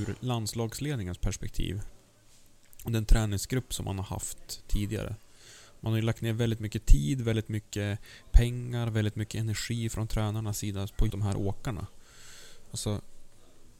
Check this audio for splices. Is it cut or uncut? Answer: cut